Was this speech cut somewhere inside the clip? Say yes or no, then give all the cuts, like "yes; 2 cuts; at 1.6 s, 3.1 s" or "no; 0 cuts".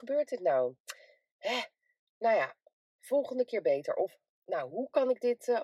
no; 0 cuts